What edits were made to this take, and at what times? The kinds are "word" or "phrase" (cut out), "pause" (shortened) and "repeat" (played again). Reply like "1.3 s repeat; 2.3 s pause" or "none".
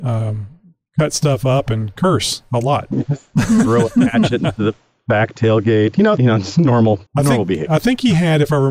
6.2 s phrase; 7.1 s pause